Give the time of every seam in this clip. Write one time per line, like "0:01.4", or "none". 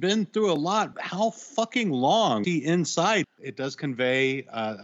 0:00.9
0:02.4
0:03.2